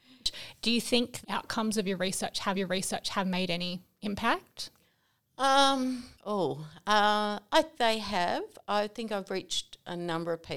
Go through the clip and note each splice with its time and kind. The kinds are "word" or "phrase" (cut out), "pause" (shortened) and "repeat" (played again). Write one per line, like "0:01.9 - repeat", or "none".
0:01.2 - word
0:02.5 - repeat
0:06.1 - pause
0:07.7 - word